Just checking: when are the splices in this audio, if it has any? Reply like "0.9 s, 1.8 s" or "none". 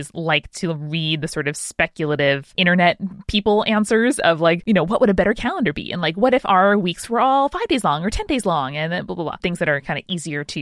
none